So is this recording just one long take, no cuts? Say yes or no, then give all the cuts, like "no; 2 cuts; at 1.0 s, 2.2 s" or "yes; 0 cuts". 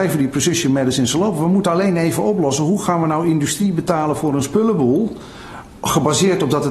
yes; 0 cuts